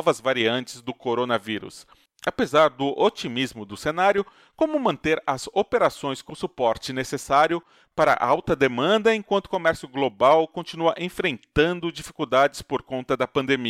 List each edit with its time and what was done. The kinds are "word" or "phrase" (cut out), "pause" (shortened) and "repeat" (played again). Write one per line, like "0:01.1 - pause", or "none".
none